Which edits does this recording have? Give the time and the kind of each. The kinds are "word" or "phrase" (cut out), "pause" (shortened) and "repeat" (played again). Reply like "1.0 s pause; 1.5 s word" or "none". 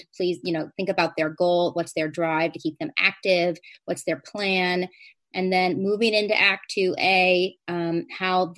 none